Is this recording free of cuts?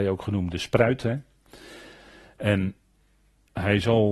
yes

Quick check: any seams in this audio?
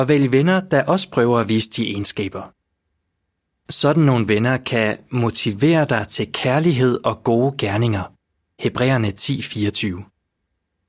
no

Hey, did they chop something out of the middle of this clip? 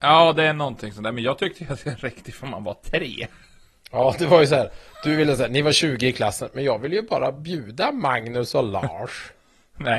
no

